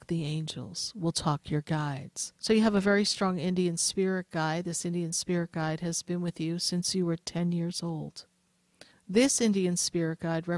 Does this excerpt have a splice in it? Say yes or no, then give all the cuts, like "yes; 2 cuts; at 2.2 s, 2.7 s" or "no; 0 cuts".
yes; 2 cuts; at 2.4 s, 8.9 s